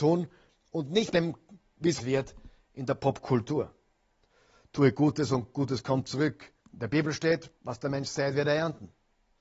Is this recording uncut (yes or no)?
no